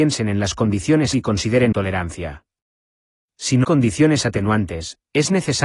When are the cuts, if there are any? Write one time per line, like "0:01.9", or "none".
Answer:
0:01.1
0:01.7
0:03.6